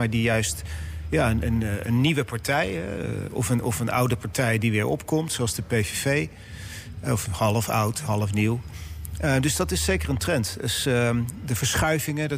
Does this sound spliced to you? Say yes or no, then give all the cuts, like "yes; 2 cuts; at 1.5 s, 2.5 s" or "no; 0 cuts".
no; 0 cuts